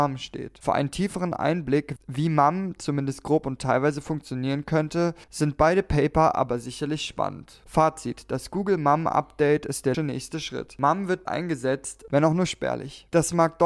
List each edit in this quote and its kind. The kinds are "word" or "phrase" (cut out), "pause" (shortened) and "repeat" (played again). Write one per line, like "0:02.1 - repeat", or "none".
0:02.0 - word
0:09.9 - word
0:11.3 - word